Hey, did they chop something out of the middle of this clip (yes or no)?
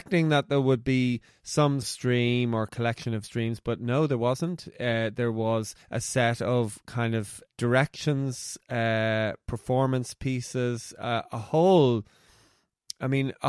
yes